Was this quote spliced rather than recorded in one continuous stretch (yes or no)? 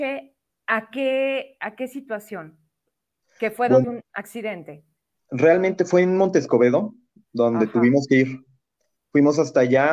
yes